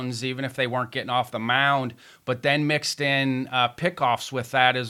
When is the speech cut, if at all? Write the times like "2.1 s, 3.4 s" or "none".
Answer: none